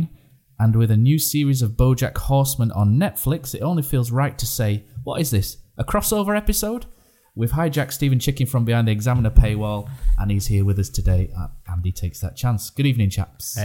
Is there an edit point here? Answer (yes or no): no